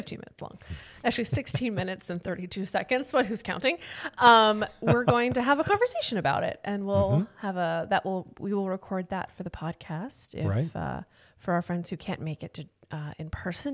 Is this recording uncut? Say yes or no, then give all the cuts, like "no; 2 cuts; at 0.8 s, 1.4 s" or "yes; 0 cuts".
yes; 0 cuts